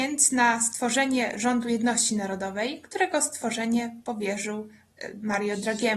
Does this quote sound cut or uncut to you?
uncut